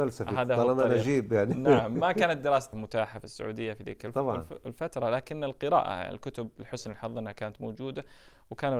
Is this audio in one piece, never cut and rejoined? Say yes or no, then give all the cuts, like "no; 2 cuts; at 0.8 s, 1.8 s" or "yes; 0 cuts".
no; 1 cut; at 2.7 s